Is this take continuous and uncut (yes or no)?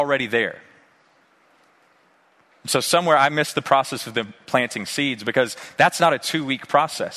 yes